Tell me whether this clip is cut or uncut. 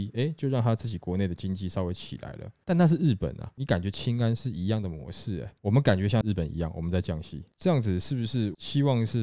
cut